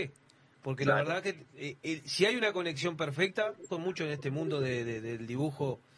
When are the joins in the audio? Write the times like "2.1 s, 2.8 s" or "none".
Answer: 3.7 s